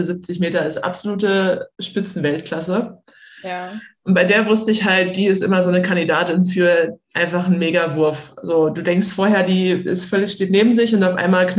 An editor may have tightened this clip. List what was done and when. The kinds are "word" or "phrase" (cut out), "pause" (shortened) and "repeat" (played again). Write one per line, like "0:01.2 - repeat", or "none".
0:01.7 - pause
0:07.0 - pause